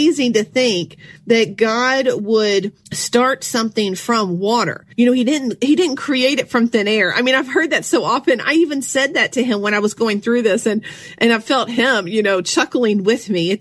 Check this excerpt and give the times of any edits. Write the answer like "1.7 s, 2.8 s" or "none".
1.2 s, 2.8 s, 4.9 s